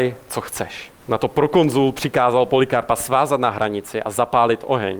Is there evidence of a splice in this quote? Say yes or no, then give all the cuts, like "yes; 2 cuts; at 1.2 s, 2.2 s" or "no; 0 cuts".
yes; 1 cut; at 1.0 s